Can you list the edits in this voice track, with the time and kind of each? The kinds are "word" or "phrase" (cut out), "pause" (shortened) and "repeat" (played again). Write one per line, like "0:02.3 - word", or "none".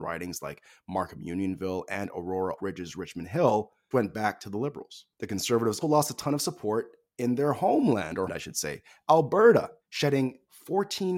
0:02.6 - word
0:03.9 - word
0:05.1 - pause
0:05.8 - word
0:08.3 - word
0:09.8 - pause